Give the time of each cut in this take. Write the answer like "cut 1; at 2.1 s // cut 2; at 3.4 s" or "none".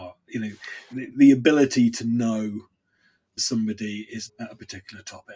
cut 1; at 1.1 s // cut 2; at 3.4 s // cut 3; at 4.3 s